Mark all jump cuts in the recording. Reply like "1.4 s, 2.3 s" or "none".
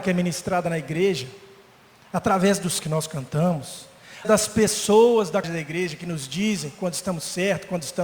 2.8 s, 4.2 s, 5.4 s

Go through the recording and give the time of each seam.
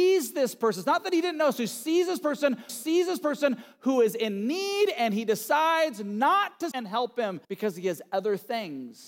2.7 s, 6.7 s, 7.4 s

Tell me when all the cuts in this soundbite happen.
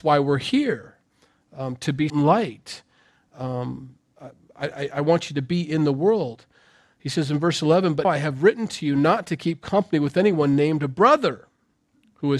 2.1 s, 8.0 s

